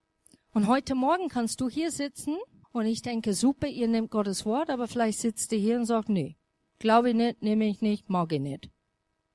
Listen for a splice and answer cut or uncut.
cut